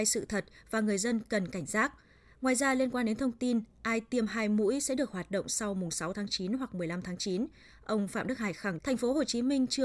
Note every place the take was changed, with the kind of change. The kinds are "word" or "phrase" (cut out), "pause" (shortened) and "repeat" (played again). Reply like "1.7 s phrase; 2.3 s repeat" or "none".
8.8 s word